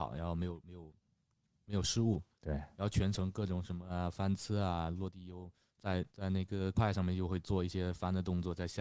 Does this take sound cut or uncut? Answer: cut